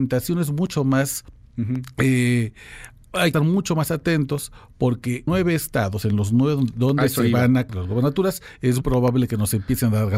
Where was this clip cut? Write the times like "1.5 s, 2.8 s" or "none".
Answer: 3.3 s, 5.3 s, 7.7 s, 8.8 s